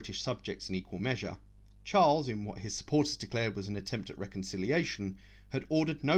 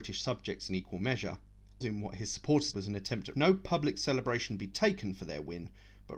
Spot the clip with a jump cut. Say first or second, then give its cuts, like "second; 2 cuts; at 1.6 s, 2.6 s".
second; 3 cuts; at 1.8 s, 2.7 s, 3.3 s